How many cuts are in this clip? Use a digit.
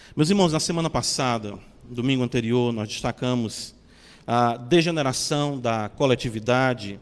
0